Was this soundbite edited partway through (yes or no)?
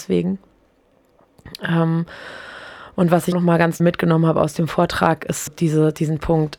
yes